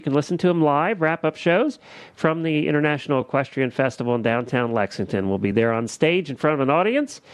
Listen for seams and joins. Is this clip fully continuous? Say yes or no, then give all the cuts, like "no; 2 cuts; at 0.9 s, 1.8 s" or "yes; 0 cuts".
yes; 0 cuts